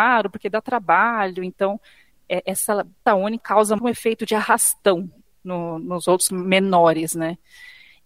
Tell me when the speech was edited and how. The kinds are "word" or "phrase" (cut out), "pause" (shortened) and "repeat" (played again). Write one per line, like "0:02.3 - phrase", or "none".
0:03.1 - word
0:03.4 - word
0:03.8 - word
0:06.3 - word